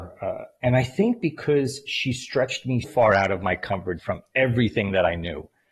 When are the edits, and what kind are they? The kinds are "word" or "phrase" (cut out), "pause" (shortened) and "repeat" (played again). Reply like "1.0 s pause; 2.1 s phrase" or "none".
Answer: 2.8 s word; 4.0 s word